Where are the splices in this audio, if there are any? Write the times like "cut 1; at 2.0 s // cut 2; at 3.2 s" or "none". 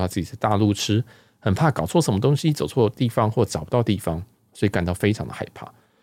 none